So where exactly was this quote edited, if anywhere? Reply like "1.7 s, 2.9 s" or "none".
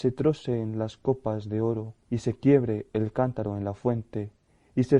2.0 s